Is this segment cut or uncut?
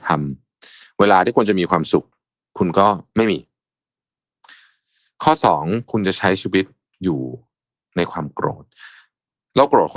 uncut